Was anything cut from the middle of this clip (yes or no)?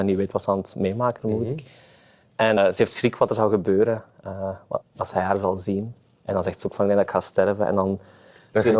yes